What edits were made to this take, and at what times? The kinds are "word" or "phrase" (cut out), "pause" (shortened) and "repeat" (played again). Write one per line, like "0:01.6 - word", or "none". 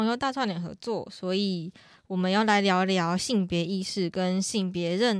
none